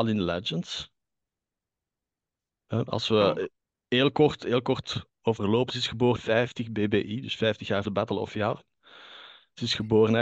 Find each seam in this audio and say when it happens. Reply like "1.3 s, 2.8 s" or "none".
3.6 s, 5.1 s, 6.2 s, 7.8 s